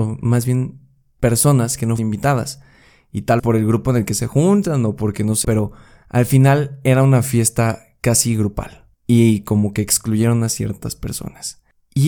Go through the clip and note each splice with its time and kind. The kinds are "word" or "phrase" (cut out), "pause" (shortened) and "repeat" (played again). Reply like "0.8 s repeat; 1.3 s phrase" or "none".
2.0 s word; 3.4 s word; 5.4 s word